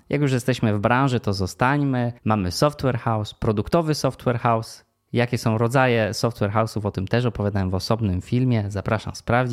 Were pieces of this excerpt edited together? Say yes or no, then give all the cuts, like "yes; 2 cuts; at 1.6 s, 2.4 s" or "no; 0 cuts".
yes; 1 cut; at 2.2 s